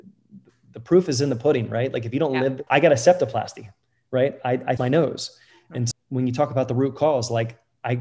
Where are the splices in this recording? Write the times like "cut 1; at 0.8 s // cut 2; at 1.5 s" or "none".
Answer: cut 1; at 2.7 s // cut 2; at 4.8 s // cut 3; at 5.9 s